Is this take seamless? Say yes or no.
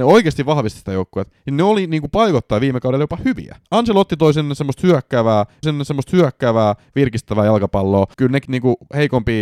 no